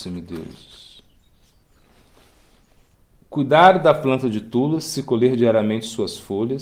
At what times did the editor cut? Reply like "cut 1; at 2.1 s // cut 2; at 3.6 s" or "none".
none